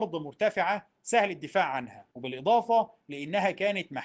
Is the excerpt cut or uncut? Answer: cut